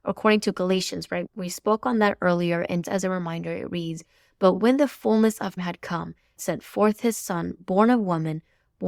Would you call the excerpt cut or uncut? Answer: cut